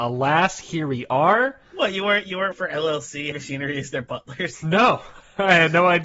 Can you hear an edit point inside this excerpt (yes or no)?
yes